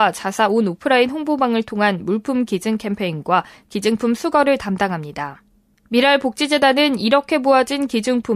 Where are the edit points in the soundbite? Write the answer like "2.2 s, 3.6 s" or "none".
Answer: none